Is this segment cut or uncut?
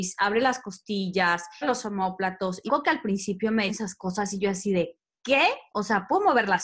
cut